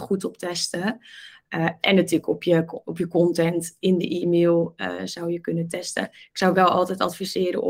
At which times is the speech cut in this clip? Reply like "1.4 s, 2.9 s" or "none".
none